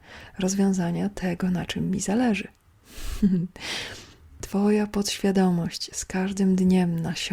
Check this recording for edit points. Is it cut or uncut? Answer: uncut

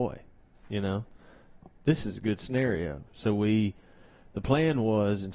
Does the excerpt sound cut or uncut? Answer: uncut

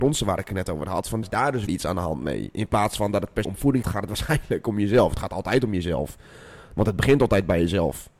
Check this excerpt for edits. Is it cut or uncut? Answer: cut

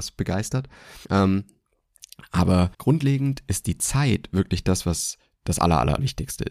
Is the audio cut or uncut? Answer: cut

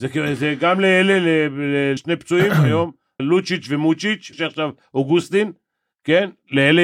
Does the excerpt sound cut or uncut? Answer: cut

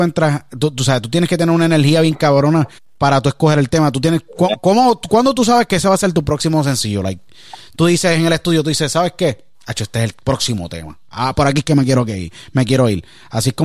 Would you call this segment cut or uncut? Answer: cut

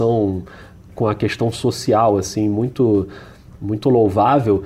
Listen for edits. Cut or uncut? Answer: uncut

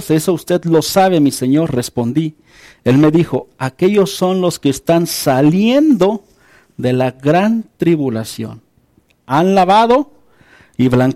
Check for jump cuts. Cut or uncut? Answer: uncut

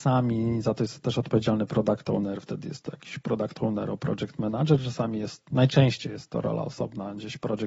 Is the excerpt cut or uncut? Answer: uncut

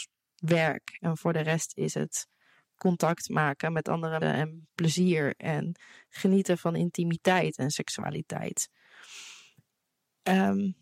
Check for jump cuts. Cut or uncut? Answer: cut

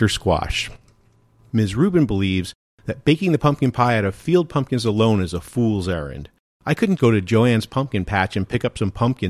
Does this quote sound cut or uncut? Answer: cut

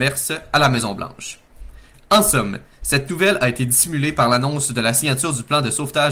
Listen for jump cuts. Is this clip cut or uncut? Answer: uncut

